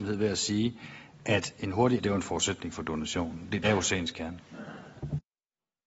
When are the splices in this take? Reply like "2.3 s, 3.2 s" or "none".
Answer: 2.0 s, 3.6 s